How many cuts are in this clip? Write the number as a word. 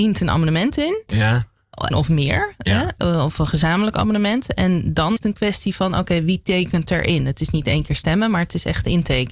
two